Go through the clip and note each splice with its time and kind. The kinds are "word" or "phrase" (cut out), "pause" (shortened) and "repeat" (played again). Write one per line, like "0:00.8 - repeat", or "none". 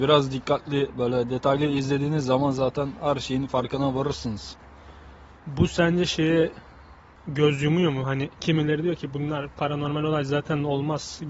0:07.2 - pause
0:08.3 - pause